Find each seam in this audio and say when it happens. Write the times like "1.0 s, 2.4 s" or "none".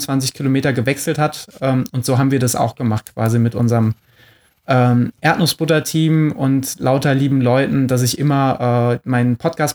none